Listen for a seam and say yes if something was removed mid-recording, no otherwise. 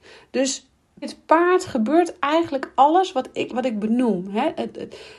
yes